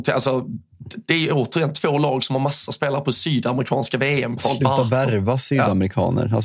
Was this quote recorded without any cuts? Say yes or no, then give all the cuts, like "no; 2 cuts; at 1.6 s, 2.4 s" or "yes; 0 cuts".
yes; 0 cuts